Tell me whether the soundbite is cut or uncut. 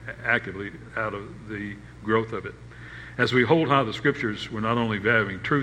uncut